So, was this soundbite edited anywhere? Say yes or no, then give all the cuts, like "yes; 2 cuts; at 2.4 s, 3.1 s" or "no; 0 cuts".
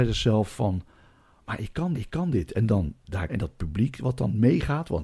yes; 2 cuts; at 1.9 s, 3.3 s